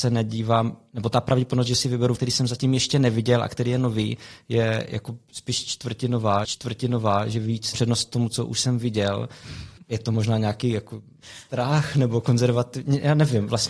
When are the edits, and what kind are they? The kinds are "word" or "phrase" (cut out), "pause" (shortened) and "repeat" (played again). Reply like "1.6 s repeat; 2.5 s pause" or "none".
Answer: 2.2 s word; 6.4 s repeat; 7.7 s word; 9.8 s pause